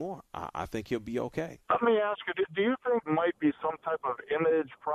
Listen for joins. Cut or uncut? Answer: cut